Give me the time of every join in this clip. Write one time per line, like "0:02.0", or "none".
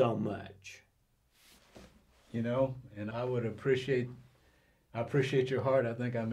0:03.1

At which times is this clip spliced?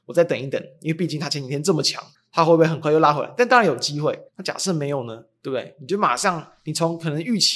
0:02.1
0:04.3

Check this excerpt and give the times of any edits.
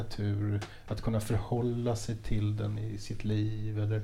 none

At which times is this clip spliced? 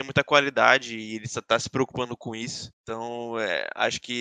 0:02.7

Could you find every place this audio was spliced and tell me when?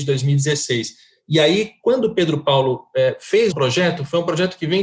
0:03.5

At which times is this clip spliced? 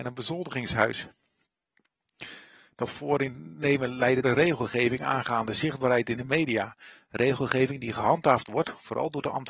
0:04.2

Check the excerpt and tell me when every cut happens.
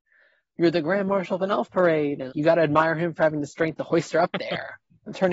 0:02.3

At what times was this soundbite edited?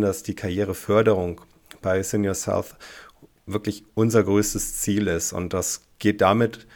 none

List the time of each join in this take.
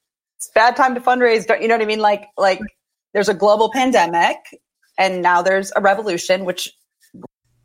none

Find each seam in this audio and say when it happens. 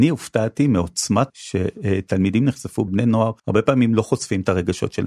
0:01.3
0:02.9
0:03.4

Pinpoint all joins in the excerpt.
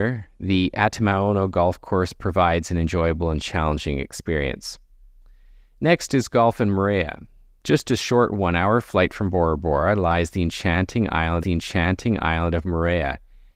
0:11.4

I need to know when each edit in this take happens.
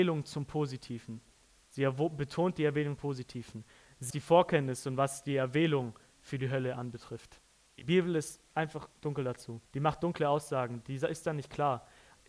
0:03.0
0:04.1
0:09.7

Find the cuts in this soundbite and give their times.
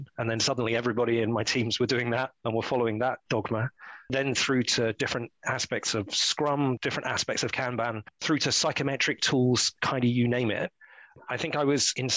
none

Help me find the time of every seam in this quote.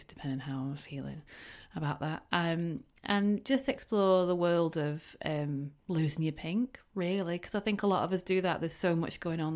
0:05.8

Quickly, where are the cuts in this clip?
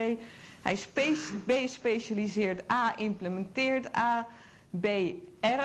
none

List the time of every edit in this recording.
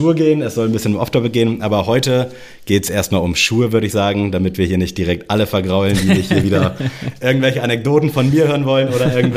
none

